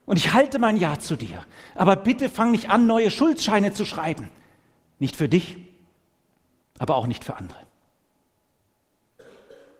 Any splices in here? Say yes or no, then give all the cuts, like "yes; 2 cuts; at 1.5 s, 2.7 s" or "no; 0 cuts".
no; 0 cuts